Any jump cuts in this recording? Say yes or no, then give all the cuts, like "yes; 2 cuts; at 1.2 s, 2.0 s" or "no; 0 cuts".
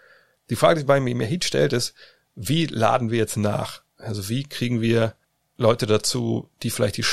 yes; 2 cuts; at 3.9 s, 5.2 s